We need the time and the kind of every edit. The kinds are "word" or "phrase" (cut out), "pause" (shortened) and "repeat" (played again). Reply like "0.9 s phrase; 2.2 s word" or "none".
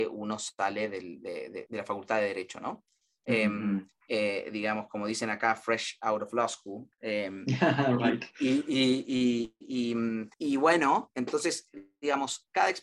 1.7 s word; 3.0 s pause; 10.3 s pause